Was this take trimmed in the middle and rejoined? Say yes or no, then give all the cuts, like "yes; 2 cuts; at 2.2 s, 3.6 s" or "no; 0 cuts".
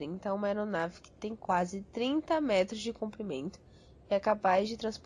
no; 0 cuts